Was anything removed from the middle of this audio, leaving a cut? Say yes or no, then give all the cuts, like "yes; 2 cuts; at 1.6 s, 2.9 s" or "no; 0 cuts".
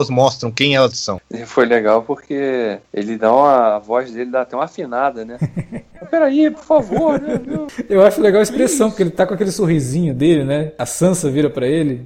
yes; 1 cut; at 0.9 s